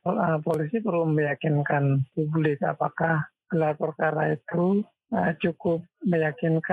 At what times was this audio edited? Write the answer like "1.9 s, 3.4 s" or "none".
2.1 s